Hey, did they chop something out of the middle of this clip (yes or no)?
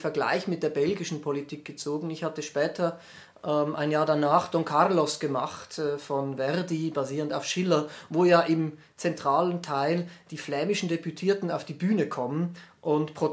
no